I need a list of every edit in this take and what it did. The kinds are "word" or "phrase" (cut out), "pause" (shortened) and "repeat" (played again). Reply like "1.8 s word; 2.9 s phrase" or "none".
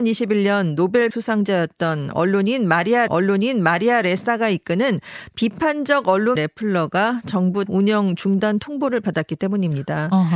1.1 s word; 3.1 s repeat; 6.4 s word; 7.7 s word

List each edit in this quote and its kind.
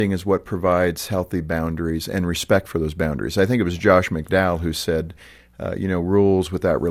none

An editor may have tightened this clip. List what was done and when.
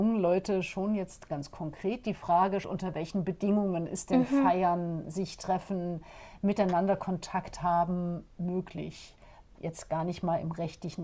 2.6 s word

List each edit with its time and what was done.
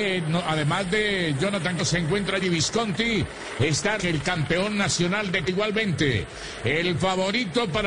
1.8 s word; 2.4 s word; 4.0 s word; 5.5 s word

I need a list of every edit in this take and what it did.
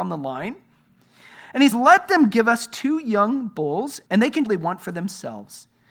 1.7 s word; 4.1 s pause; 4.4 s phrase

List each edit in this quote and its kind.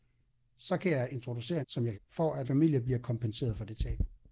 1.6 s phrase; 1.9 s phrase; 2.4 s word

